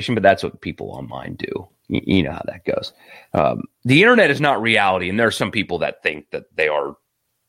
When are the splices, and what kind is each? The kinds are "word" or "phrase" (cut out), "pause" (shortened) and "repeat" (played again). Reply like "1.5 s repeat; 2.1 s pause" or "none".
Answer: none

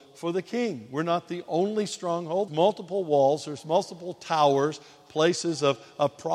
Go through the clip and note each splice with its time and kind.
2.5 s phrase

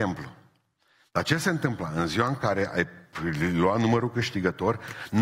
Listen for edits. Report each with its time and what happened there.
none

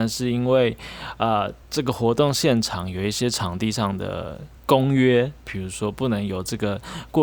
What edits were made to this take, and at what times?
1.6 s pause; 4.6 s pause

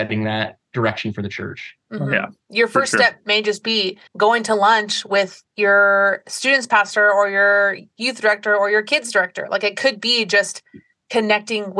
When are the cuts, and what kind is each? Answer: 1.8 s pause; 4.1 s pause; 5.5 s pause

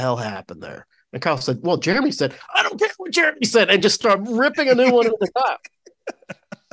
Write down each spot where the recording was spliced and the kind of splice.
none

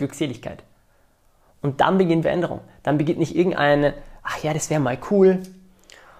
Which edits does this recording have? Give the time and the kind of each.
2.2 s word

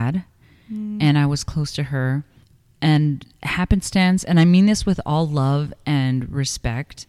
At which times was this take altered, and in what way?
2.4 s pause

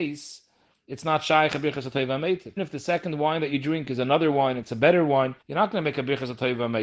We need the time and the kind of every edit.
2.6 s word; 5.4 s pause

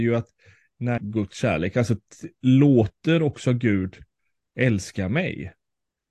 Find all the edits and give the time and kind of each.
1.0 s phrase

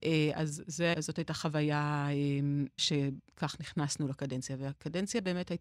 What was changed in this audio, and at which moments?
0.9 s word; 2.8 s word

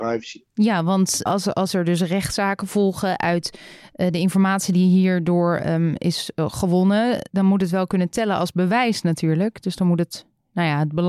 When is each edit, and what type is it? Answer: 1.3 s word

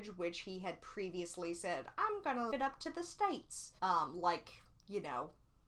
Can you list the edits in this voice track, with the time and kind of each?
2.5 s word; 3.8 s pause

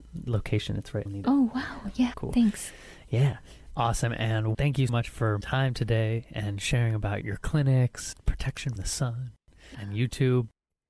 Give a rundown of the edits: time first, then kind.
1.1 s word; 2.1 s word; 4.5 s word; 4.9 s word; 5.4 s word; 7.2 s word; 8.1 s word; 8.8 s word; 9.7 s word

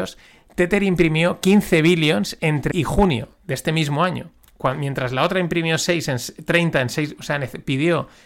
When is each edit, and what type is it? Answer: 2.7 s word

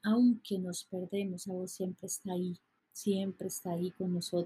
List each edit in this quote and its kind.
1.4 s word; 2.8 s pause

